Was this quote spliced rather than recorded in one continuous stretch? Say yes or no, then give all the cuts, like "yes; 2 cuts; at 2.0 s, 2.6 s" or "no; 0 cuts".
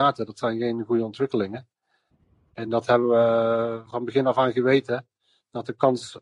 no; 0 cuts